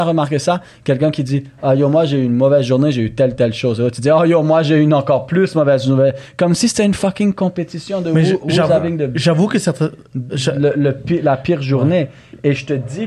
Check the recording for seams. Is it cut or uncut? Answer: uncut